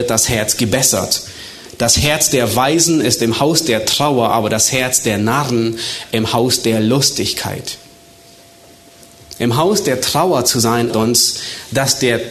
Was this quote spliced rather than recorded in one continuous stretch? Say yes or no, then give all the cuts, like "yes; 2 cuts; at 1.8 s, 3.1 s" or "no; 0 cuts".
yes; 1 cut; at 10.9 s